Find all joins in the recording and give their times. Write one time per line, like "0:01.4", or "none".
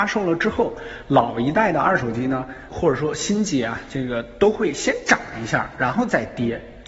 0:02.7